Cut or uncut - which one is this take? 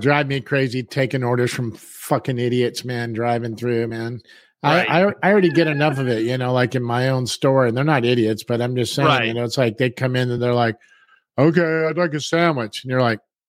uncut